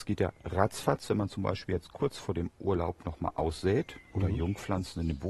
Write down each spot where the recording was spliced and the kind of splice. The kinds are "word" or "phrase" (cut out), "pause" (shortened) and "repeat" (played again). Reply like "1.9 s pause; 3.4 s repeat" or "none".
none